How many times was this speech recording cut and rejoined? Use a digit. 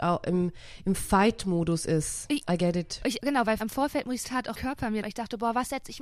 6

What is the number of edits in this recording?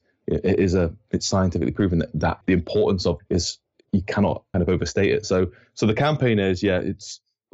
3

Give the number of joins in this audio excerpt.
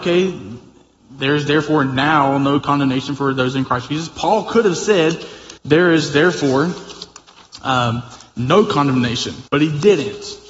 2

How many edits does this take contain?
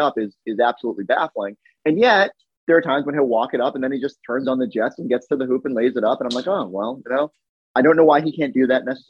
0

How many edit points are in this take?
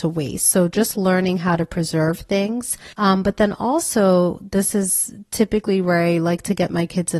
1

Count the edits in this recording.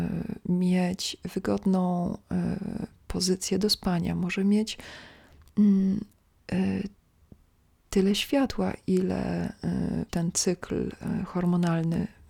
1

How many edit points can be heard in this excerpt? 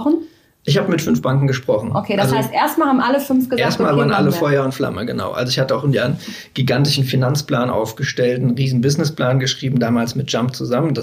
0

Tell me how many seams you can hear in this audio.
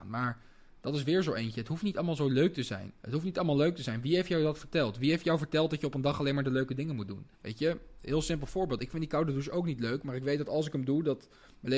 2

